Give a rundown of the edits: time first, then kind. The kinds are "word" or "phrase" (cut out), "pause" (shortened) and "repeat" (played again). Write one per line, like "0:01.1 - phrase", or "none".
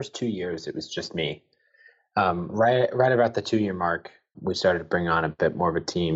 0:04.3 - word